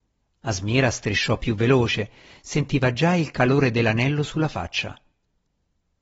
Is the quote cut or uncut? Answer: uncut